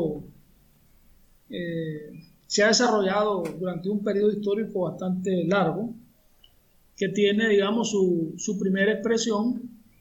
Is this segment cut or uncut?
uncut